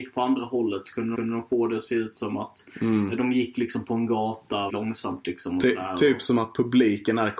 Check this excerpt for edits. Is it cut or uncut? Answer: cut